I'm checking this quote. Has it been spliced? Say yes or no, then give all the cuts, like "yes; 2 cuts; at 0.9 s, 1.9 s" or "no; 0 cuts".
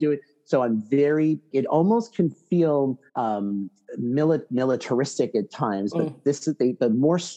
yes; 3 cuts; at 1.5 s, 3.1 s, 4.5 s